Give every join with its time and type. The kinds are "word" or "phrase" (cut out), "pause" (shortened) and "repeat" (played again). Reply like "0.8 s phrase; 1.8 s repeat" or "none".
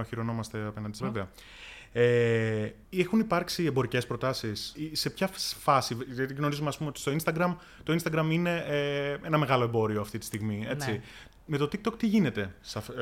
1.0 s word; 2.8 s pause; 4.8 s word